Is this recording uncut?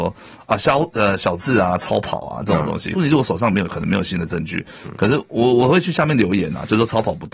no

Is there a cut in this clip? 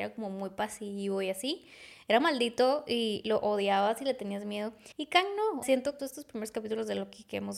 yes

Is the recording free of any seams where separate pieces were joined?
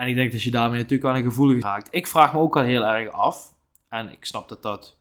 no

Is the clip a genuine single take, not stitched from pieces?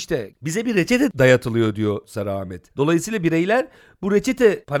no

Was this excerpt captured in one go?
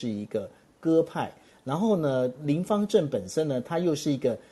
yes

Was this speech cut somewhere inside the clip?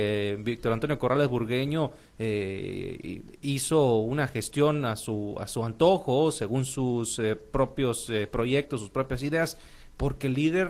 no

